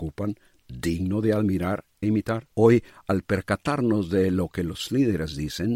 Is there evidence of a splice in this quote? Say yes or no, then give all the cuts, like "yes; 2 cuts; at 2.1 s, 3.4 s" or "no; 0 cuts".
yes; 2 cuts; at 2.0 s, 2.5 s